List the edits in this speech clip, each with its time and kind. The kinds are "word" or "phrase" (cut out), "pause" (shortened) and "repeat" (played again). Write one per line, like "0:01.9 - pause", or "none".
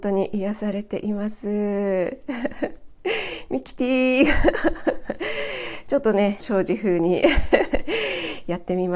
0:06.4 - phrase